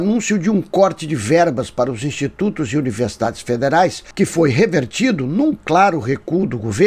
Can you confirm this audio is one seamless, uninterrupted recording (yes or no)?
yes